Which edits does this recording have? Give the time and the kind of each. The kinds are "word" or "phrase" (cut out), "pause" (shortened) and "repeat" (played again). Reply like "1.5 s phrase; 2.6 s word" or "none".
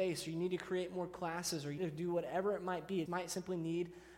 1.8 s word; 3.1 s word